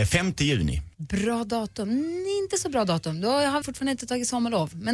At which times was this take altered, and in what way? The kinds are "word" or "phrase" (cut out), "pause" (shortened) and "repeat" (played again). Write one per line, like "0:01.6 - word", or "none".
0:00.9 - pause
0:03.6 - word

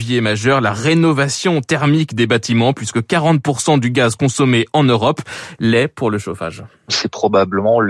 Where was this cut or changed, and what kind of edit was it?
none

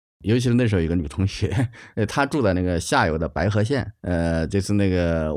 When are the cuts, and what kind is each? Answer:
0:04.0 - pause

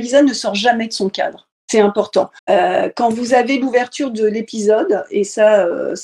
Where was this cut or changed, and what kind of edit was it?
0:01.6 - pause
0:02.4 - pause

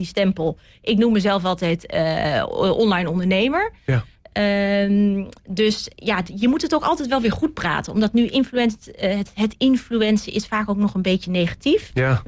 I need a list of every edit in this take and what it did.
none

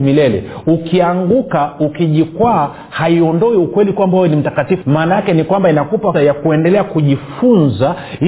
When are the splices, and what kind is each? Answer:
0:04.8 - word
0:06.1 - word

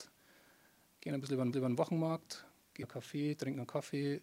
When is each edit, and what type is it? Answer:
0:01.5 - repeat
0:02.8 - word

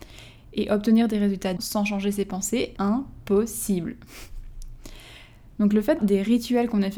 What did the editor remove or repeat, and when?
0:01.6 - word
0:02.8 - word
0:06.0 - word

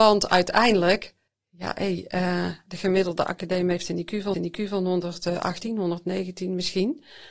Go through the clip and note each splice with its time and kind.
0:01.3 - pause
0:04.3 - repeat

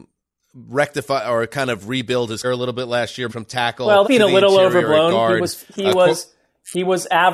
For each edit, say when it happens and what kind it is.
0:02.4 - word
0:03.3 - word
0:04.0 - word

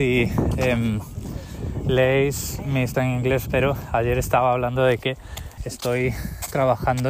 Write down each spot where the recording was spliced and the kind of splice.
0:02.9 - word
0:03.5 - phrase
0:05.6 - word

